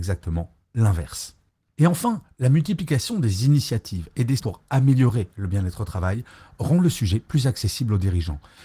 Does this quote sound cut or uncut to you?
cut